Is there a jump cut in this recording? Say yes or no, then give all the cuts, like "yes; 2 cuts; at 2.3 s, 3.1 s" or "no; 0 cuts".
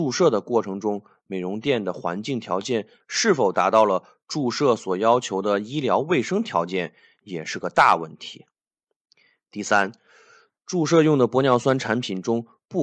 no; 0 cuts